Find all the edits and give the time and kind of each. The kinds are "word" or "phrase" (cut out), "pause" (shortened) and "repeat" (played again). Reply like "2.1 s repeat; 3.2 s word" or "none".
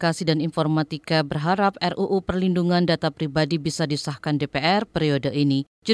none